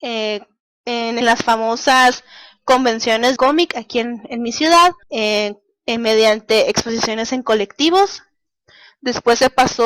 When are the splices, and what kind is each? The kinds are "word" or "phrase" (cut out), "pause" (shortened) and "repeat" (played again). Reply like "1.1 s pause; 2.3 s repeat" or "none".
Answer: 1.2 s phrase; 3.4 s phrase; 5.0 s pause